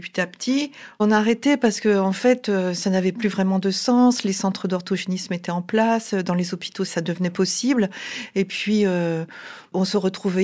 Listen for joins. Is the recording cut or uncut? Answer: uncut